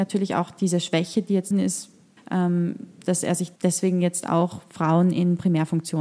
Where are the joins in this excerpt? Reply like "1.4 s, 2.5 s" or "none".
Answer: 1.5 s, 2.2 s, 3.6 s